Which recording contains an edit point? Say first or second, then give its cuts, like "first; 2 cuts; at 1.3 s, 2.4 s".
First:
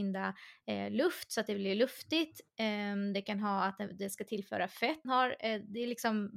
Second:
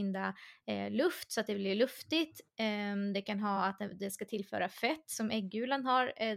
first; 1 cut; at 5.0 s